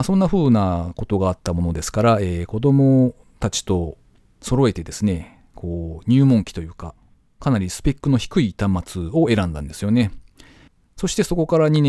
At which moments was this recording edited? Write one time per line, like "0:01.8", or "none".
none